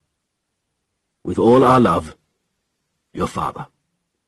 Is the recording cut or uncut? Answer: uncut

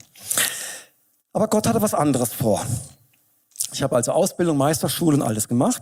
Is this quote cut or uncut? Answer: uncut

